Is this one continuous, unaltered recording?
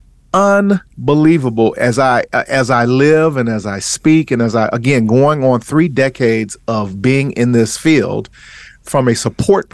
yes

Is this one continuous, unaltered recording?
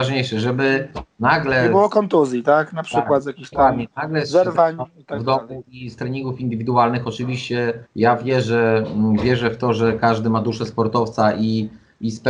no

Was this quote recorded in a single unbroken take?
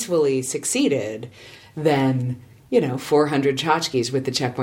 yes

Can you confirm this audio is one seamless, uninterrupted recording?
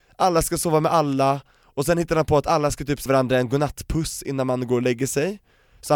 no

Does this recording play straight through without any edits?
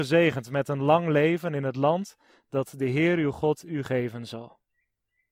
yes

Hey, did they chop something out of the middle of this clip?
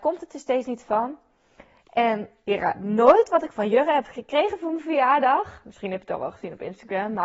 no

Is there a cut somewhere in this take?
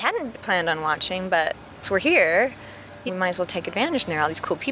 yes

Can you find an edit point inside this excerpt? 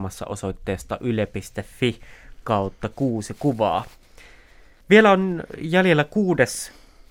no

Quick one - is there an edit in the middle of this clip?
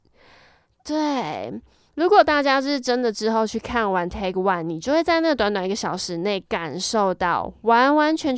no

